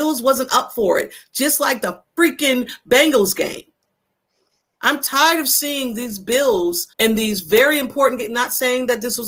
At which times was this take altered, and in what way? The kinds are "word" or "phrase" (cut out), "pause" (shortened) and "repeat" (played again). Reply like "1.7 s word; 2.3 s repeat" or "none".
6.9 s pause